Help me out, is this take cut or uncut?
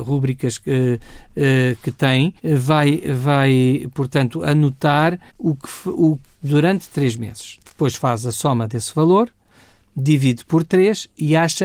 cut